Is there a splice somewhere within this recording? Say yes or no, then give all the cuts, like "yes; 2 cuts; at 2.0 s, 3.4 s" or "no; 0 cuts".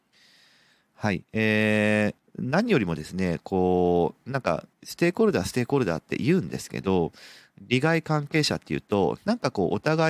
yes; 2 cuts; at 2.2 s, 4.7 s